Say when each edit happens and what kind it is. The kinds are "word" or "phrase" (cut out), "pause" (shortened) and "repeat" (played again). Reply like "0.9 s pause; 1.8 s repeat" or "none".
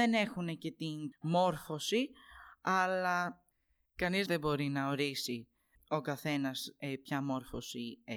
1.1 s word; 4.3 s word; 5.7 s word